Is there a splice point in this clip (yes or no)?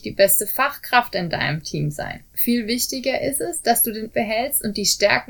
yes